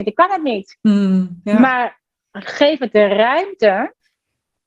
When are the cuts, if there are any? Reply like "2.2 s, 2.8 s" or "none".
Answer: none

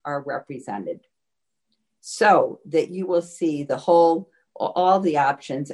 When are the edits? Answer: none

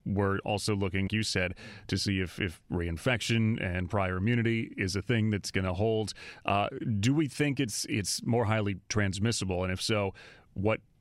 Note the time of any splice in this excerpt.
1.1 s

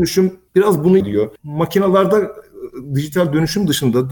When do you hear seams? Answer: 1.0 s, 1.4 s

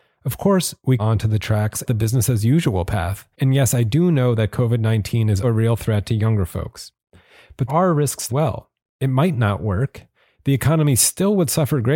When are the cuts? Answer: 1.0 s, 1.9 s, 3.3 s, 5.4 s, 7.7 s, 8.3 s

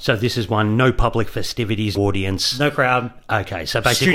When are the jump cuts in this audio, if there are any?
2.0 s

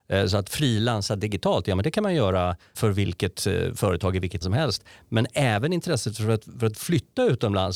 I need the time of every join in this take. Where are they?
2.7 s, 4.4 s

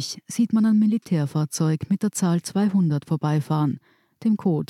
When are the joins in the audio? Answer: none

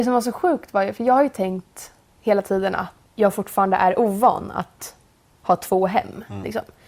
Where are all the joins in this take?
3.1 s

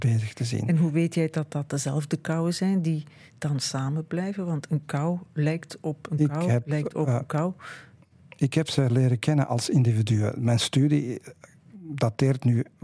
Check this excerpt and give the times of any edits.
none

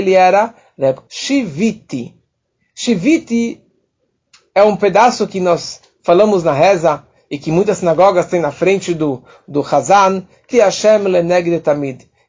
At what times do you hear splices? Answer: 1.1 s, 10.5 s

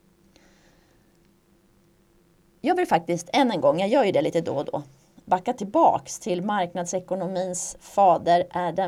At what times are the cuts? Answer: none

